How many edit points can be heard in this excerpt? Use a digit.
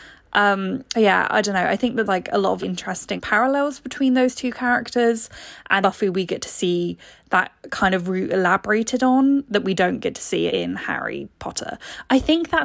6